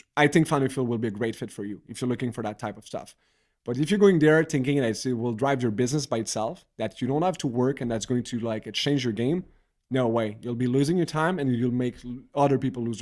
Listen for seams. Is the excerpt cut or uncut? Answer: uncut